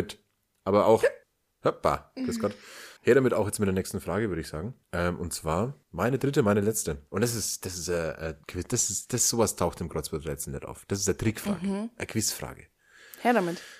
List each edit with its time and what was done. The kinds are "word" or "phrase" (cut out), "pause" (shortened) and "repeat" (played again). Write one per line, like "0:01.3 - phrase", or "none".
0:01.2 - pause
0:03.0 - pause
0:04.8 - pause
0:05.8 - pause
0:07.1 - pause
0:08.4 - pause